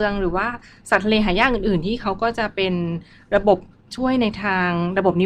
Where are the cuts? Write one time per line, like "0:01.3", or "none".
none